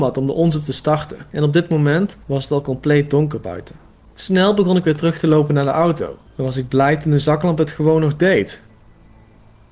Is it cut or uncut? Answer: cut